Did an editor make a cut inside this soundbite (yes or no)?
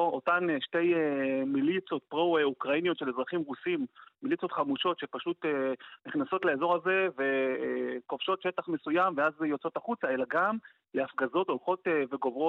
no